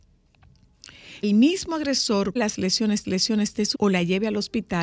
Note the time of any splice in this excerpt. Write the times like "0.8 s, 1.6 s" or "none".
1.2 s, 2.4 s, 3.0 s, 3.7 s